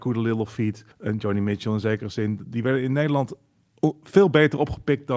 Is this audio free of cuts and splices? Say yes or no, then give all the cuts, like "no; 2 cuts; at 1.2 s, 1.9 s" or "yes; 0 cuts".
no; 1 cut; at 0.9 s